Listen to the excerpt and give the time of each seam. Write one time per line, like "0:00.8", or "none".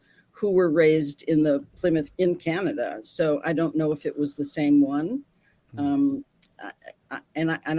0:02.1